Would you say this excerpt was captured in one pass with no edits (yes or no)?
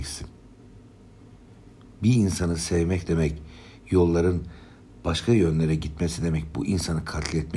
no